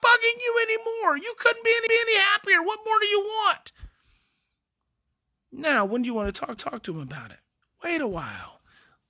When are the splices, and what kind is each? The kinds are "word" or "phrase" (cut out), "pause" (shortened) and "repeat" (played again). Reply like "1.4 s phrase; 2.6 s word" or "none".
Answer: 1.9 s repeat; 6.6 s repeat; 7.6 s pause